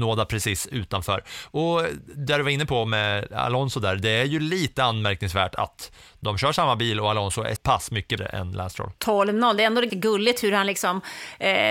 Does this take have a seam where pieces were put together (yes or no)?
yes